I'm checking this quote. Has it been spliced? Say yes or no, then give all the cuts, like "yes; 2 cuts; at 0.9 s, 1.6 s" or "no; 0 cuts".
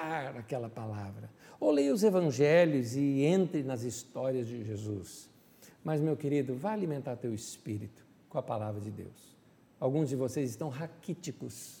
no; 0 cuts